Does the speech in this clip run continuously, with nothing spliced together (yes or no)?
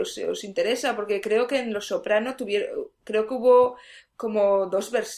yes